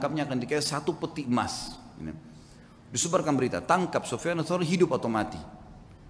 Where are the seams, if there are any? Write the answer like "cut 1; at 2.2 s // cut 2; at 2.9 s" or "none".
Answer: none